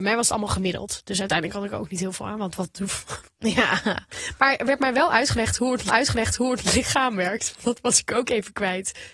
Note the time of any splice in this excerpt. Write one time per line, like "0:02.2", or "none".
0:05.9